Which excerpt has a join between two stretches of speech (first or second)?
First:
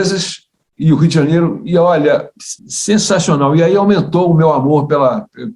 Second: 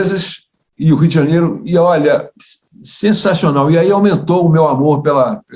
first